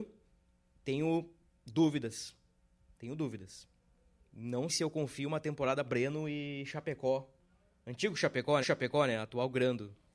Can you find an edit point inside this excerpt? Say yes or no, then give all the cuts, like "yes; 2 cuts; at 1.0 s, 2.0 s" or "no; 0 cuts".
yes; 3 cuts; at 4.7 s, 5.8 s, 8.6 s